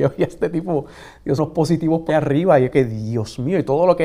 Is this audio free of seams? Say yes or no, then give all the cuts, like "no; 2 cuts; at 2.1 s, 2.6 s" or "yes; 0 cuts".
no; 3 cuts; at 1.4 s, 2.1 s, 2.7 s